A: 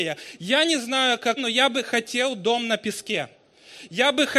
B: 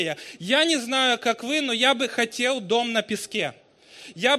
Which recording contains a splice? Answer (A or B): A